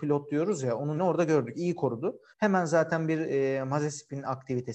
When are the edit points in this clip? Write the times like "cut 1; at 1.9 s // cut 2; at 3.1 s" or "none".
cut 1; at 1.0 s // cut 2; at 2.3 s